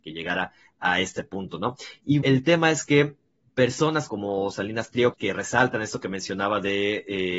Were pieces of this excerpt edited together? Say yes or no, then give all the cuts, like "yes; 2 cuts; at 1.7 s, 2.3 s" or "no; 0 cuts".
yes; 4 cuts; at 2.2 s, 3.5 s, 4.1 s, 5.1 s